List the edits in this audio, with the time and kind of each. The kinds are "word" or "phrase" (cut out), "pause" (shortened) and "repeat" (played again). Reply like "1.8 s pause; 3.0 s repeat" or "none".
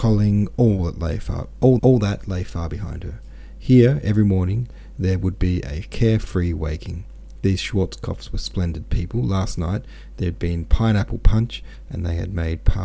1.8 s repeat